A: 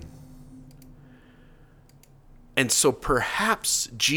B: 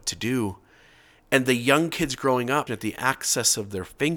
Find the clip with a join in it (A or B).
B